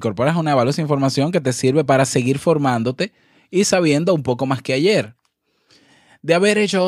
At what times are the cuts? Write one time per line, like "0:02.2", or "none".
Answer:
none